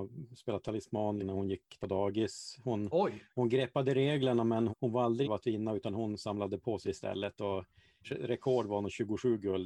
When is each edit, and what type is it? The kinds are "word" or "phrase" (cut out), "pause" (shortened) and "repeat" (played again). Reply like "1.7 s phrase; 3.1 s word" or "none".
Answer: 1.2 s word; 1.8 s word; 4.7 s word; 5.2 s word; 6.8 s word; 8.0 s word